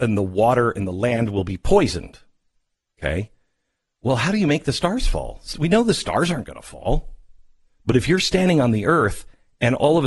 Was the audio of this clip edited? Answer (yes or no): no